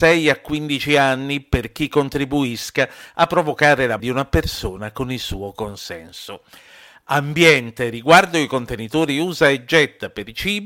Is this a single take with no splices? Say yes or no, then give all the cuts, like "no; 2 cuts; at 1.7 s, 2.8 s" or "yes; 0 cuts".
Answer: no; 1 cut; at 4.0 s